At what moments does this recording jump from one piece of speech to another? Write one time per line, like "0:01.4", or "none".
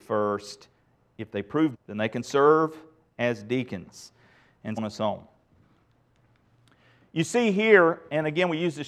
0:01.7
0:04.8